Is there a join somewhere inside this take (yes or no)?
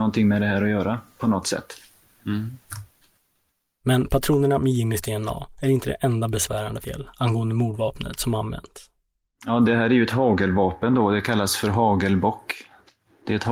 yes